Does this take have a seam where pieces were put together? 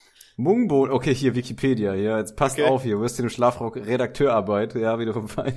no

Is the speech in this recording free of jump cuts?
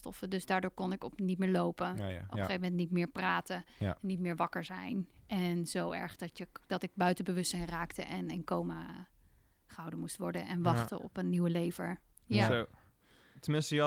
yes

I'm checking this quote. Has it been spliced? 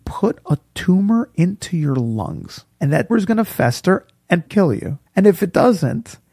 yes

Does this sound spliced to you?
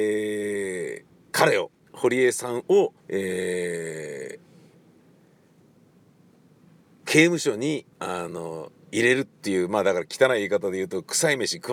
yes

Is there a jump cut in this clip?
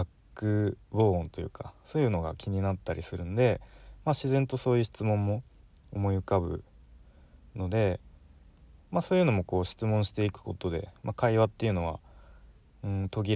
no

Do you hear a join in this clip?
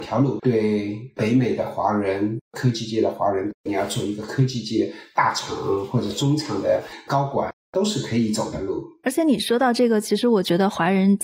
no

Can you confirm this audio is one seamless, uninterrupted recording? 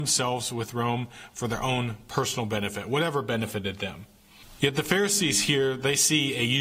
yes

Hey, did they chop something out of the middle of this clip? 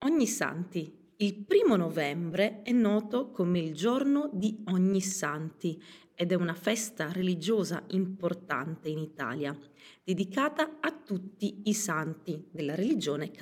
no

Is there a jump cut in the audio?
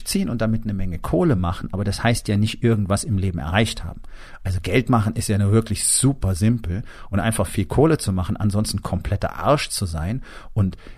no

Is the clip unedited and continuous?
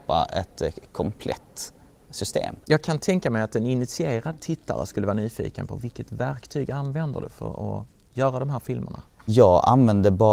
no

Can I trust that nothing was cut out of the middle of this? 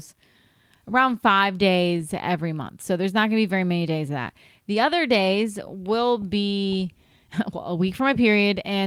yes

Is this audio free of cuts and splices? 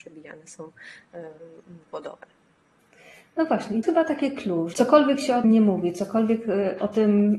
no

